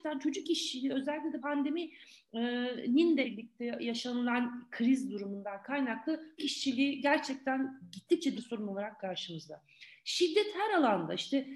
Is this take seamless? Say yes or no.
no